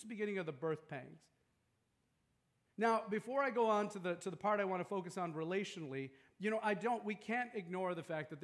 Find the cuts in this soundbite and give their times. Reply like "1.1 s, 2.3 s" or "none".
none